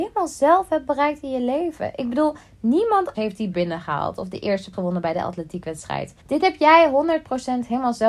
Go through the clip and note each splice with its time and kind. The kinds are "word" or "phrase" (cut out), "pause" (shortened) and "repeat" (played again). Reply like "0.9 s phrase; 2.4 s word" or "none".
3.1 s word; 3.5 s word; 4.7 s word; 6.2 s pause